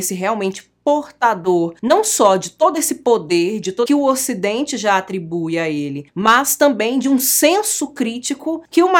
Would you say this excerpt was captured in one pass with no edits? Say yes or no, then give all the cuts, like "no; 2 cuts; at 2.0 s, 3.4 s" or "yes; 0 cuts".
no; 1 cut; at 3.9 s